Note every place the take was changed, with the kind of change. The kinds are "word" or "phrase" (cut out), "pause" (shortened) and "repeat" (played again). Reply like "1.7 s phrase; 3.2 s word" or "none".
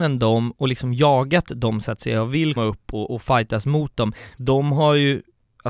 2.6 s word; 3.1 s word; 4.4 s word